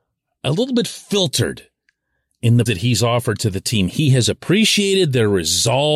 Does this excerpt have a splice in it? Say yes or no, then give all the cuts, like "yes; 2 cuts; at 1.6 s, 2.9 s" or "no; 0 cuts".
yes; 1 cut; at 2.7 s